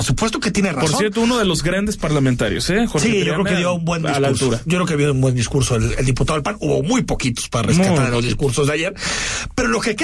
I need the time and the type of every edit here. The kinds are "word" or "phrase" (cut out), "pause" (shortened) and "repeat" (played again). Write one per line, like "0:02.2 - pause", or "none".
none